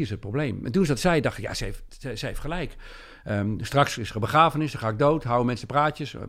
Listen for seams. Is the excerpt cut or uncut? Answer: uncut